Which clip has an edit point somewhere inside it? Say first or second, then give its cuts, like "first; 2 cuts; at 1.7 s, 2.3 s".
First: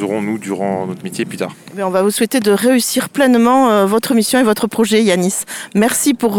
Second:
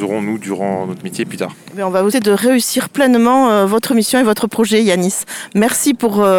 second; 1 cut; at 2.1 s